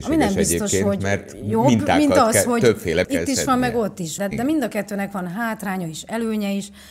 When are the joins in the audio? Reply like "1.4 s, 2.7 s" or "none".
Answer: 3.0 s, 4.2 s